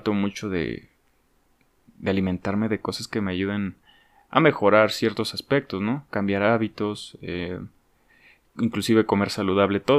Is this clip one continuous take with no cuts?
yes; 0 cuts

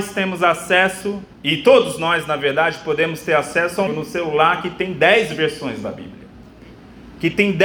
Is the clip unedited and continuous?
no; 2 cuts; at 1.3 s, 3.9 s

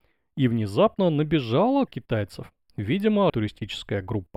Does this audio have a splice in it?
yes; 2 cuts; at 1.9 s, 3.3 s

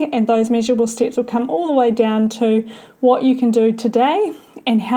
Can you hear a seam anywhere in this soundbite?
no; 0 cuts

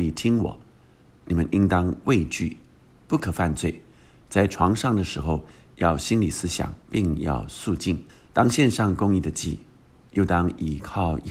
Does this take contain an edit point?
yes; 2 cuts; at 6.8 s, 8.1 s

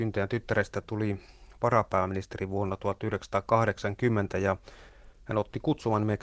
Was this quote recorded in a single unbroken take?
yes; 0 cuts

